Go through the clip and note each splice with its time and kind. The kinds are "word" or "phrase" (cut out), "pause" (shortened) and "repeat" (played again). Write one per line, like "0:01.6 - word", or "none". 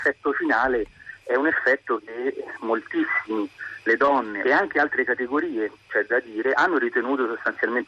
0:04.4 - phrase